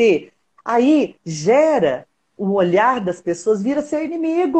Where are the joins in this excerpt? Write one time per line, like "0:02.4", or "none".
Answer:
none